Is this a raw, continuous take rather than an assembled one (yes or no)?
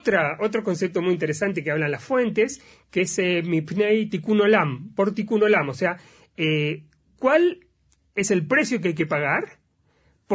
yes